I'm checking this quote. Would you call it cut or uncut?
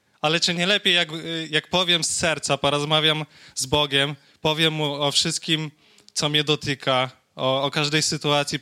uncut